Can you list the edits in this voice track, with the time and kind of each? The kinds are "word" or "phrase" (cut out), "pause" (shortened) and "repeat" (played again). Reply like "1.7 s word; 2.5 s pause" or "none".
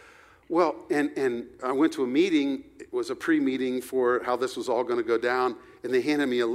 none